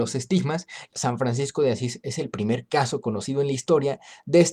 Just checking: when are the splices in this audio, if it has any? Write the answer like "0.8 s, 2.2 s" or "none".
0.9 s